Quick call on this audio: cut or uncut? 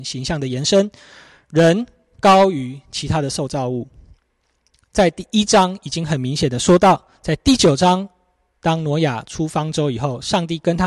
uncut